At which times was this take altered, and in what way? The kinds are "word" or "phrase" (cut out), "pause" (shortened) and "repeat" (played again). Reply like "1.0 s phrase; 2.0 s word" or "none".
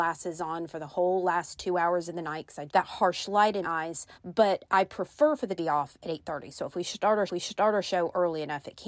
2.7 s phrase; 3.6 s word; 4.1 s pause; 5.6 s phrase; 7.3 s repeat